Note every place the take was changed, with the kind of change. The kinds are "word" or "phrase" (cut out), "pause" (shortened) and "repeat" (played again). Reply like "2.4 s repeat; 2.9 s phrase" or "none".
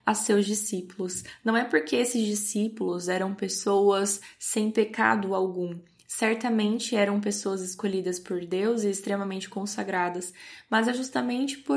none